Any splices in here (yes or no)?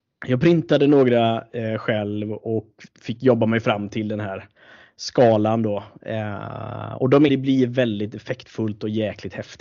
yes